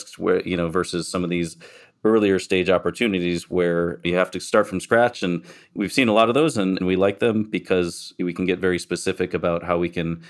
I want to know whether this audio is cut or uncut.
uncut